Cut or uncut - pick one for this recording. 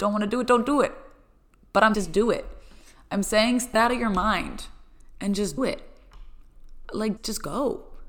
cut